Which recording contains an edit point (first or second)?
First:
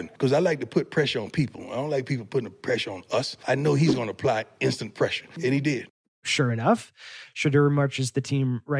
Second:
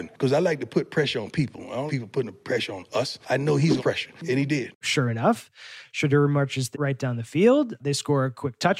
second